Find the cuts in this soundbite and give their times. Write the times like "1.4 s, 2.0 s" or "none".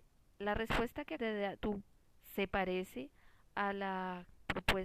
1.2 s, 1.6 s